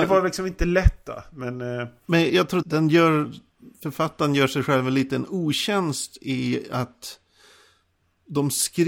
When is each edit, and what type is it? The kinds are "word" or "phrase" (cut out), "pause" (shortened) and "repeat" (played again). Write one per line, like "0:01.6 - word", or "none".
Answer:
0:02.3 - word
0:02.6 - word